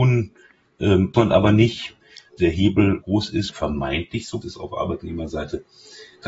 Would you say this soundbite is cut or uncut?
cut